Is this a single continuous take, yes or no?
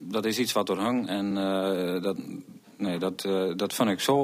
yes